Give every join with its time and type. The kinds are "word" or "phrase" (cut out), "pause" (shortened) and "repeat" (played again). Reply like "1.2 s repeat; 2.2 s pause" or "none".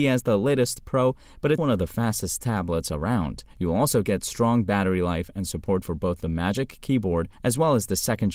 1.6 s word; 3.5 s pause; 7.3 s pause